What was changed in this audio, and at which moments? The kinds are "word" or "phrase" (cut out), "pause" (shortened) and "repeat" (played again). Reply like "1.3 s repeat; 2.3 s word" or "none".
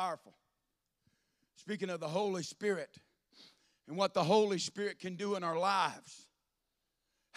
none